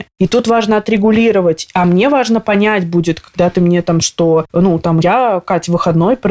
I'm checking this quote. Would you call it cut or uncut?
cut